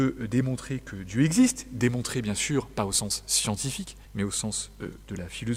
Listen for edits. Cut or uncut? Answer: cut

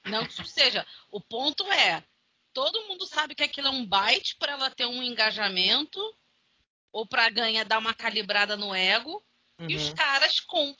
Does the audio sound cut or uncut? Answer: uncut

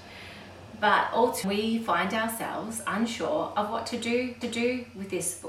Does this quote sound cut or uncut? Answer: cut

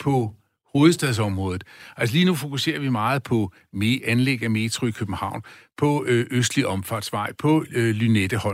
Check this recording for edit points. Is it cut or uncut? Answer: uncut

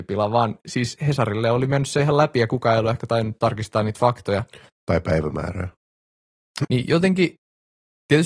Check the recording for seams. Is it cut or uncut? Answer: cut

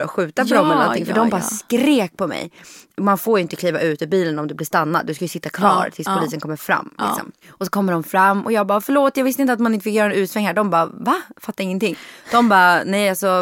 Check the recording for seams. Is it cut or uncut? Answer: uncut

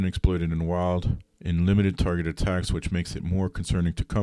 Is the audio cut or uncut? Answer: cut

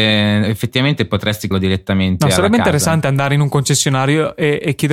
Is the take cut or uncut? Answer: cut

